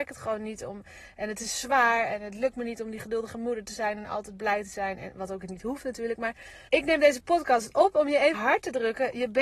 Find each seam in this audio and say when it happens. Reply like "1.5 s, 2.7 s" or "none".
6.7 s, 8.3 s